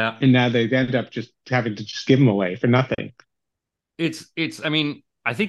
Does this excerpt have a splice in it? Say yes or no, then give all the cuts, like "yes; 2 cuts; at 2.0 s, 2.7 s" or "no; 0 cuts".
no; 0 cuts